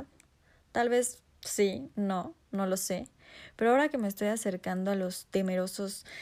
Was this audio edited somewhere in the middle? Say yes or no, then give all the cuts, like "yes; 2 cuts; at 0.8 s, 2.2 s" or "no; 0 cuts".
no; 0 cuts